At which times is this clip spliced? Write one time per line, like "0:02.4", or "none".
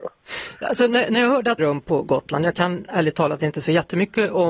0:01.6